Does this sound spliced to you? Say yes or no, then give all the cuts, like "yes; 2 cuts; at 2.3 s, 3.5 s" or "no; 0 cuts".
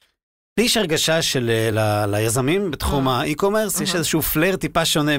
no; 0 cuts